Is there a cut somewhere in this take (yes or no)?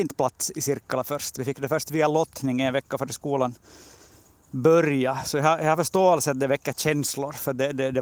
no